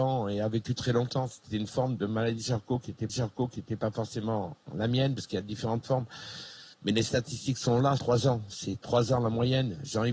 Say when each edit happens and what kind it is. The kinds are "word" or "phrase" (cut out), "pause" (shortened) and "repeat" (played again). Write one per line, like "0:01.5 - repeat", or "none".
0:03.1 - repeat
0:06.7 - pause
0:08.0 - word